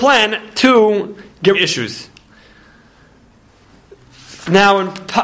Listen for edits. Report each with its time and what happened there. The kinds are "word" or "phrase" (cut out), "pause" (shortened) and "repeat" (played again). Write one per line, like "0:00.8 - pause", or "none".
0:01.5 - phrase